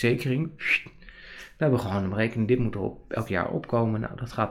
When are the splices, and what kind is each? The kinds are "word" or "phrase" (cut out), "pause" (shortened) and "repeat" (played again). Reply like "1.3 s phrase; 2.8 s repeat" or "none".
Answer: none